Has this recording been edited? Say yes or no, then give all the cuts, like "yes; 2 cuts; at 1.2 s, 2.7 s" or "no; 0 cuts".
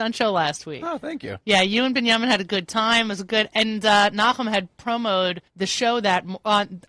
yes; 1 cut; at 5.5 s